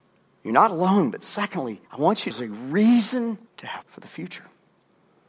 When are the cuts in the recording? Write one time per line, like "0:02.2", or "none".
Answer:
0:01.9
0:02.3
0:03.5
0:03.8